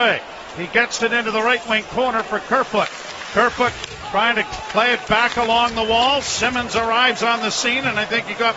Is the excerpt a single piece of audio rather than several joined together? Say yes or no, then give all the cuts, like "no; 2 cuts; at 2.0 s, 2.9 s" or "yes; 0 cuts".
no; 1 cut; at 1.0 s